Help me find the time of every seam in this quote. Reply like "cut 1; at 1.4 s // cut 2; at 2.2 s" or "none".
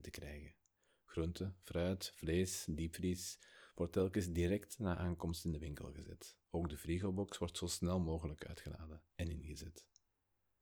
cut 1; at 6.4 s // cut 2; at 9.1 s